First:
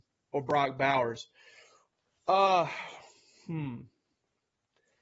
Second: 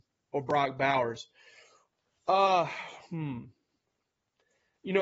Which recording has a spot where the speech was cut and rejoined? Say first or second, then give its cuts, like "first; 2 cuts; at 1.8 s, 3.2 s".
second; 1 cut; at 3.1 s